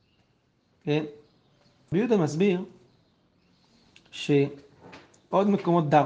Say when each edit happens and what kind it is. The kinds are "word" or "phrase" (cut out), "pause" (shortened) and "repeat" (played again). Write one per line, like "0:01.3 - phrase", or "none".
0:01.9 - word